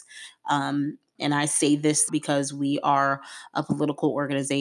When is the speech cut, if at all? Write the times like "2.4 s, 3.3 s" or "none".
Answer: 1.2 s, 2.1 s